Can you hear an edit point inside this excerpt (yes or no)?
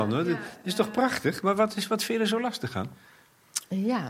no